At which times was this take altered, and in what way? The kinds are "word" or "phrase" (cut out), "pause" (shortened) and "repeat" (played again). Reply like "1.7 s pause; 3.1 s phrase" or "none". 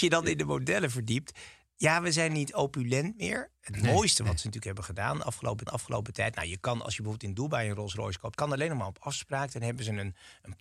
5.7 s repeat; 8.3 s word